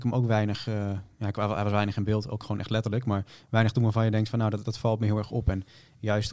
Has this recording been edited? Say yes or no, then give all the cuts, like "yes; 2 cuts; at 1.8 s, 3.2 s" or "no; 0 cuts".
yes; 1 cut; at 4.6 s